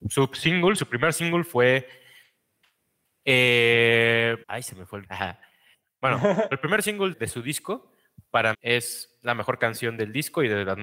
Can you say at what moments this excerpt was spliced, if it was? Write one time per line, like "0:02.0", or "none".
0:04.4
0:05.0
0:06.5
0:07.1
0:08.5